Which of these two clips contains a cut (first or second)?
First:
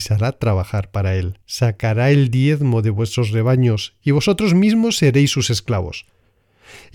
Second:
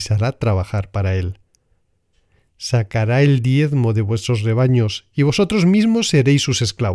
first